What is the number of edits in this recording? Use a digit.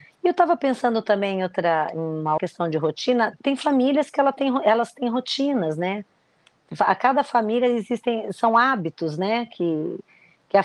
1